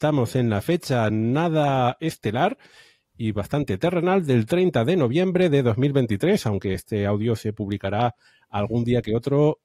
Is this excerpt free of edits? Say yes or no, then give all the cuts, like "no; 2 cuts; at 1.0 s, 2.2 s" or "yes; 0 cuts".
yes; 0 cuts